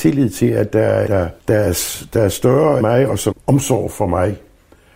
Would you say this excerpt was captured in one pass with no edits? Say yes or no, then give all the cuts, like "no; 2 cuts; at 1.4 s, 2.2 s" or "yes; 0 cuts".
no; 4 cuts; at 1.1 s, 1.4 s, 2.8 s, 3.3 s